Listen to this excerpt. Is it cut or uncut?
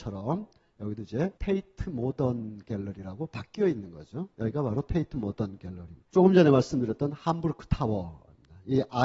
cut